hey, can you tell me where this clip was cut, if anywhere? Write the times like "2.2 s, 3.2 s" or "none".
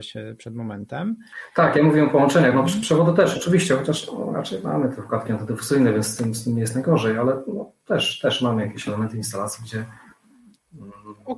none